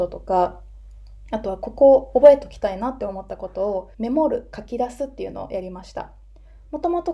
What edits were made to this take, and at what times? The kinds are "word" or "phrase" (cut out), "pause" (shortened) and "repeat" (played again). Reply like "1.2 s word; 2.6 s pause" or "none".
3.9 s pause

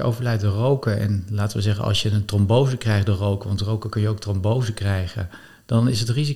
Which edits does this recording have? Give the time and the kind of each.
5.4 s pause

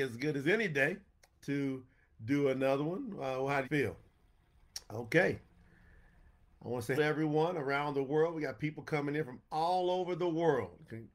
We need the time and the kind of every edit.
3.6 s word; 7.0 s word

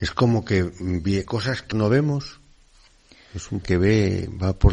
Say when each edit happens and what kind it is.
1.3 s word; 1.7 s word; 3.6 s word

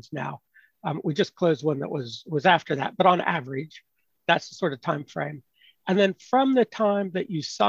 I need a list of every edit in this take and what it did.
none

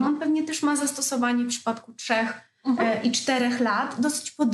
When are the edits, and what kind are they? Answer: none

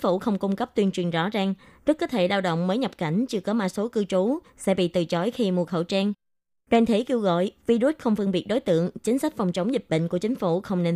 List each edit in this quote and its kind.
none

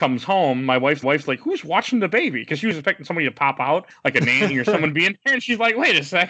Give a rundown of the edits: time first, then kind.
1.0 s repeat

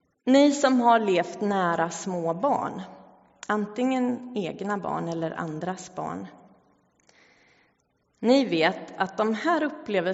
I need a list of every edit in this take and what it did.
none

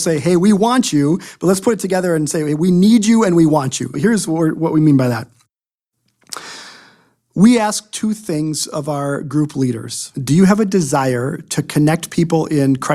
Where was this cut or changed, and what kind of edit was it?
3.9 s word; 10.1 s pause

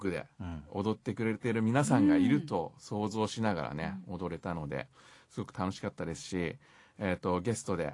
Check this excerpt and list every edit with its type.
none

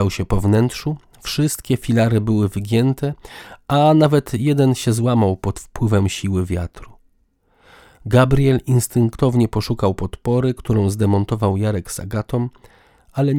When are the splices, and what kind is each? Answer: none

